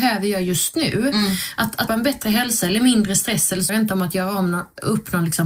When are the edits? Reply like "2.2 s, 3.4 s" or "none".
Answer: 1.9 s, 3.7 s